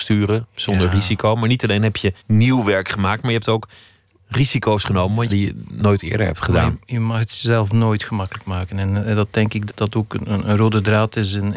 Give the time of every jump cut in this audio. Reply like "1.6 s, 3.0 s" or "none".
2.2 s, 5.3 s, 9.7 s